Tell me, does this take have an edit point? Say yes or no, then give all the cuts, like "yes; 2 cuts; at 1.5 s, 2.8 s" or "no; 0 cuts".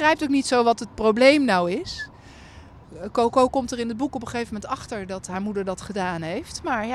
no; 0 cuts